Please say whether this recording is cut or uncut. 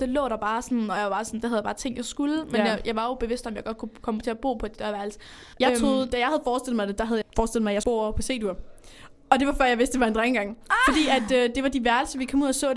cut